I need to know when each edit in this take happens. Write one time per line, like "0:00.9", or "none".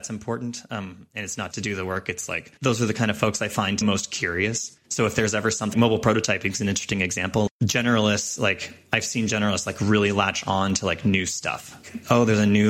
0:01.5
0:02.6
0:03.8
0:04.8
0:05.7
0:07.5